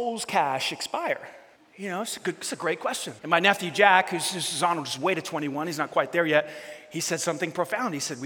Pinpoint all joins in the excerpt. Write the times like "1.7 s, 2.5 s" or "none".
1.5 s, 3.2 s